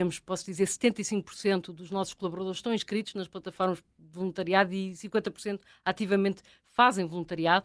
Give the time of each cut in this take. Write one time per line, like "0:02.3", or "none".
none